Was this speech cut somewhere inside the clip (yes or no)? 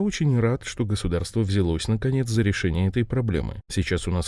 no